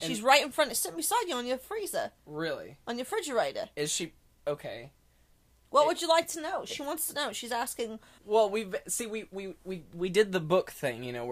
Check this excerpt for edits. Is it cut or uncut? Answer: cut